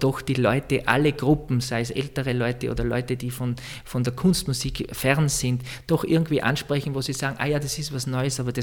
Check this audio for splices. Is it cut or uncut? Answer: uncut